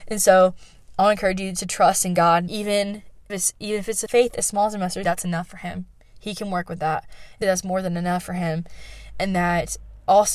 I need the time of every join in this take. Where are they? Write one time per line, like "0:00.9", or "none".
0:02.5
0:03.3
0:04.1
0:05.0
0:07.4